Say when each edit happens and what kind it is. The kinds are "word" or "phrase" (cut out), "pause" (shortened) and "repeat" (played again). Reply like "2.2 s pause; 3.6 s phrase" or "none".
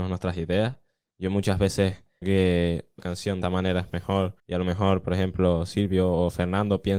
2.2 s word; 3.0 s phrase; 3.4 s word; 4.4 s pause